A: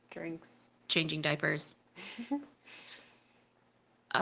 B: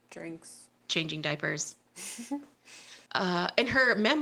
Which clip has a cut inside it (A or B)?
B